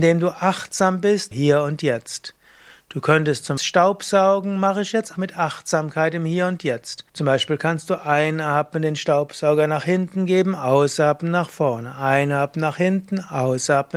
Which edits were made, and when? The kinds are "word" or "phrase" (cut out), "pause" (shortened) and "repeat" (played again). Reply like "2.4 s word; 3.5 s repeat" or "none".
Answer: 1.3 s word; 3.6 s phrase; 5.2 s word; 7.1 s pause